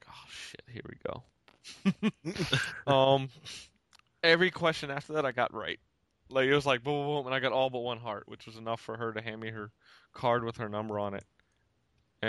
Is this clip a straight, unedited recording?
yes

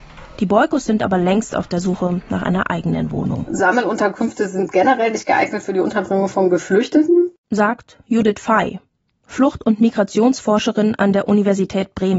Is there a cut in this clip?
no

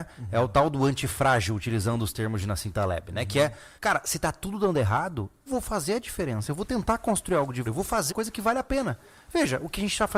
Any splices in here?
yes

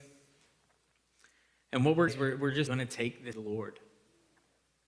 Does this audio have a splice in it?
yes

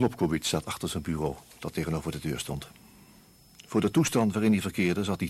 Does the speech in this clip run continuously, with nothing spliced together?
yes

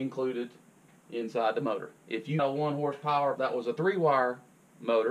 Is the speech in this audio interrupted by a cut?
yes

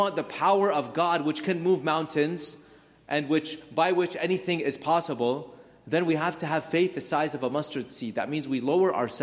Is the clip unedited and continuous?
yes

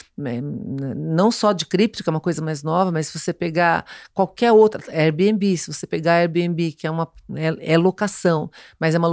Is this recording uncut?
yes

